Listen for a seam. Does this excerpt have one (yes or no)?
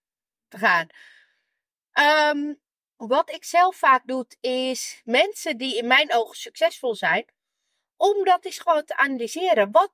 no